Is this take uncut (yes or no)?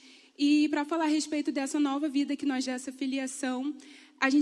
no